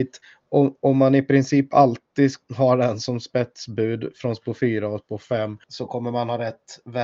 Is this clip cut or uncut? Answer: cut